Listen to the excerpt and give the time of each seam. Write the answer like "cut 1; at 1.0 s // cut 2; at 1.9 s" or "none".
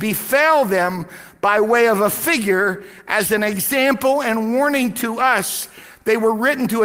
none